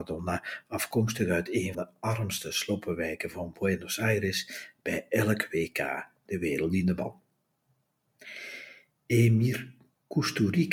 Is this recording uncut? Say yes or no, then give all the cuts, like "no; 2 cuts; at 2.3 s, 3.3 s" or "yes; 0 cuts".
no; 1 cut; at 1.7 s